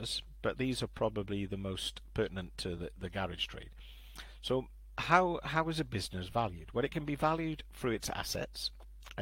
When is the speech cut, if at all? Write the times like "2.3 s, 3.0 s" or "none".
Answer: none